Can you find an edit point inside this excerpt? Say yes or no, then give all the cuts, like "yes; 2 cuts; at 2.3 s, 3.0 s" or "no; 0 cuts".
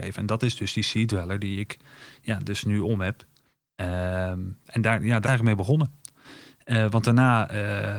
yes; 1 cut; at 5.3 s